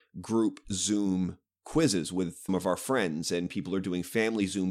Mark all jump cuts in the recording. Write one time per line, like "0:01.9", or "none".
0:02.5